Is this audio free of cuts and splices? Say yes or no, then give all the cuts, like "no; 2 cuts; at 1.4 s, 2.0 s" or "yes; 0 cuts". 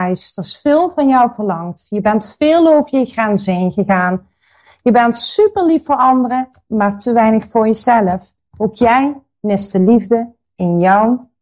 yes; 0 cuts